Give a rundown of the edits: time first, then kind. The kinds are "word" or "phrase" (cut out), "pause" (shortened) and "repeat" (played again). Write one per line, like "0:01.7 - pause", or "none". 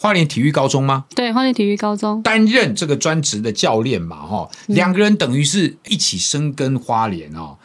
0:05.9 - word